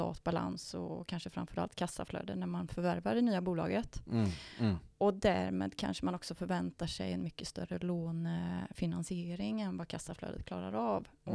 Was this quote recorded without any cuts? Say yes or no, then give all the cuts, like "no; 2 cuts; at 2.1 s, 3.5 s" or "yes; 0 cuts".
yes; 0 cuts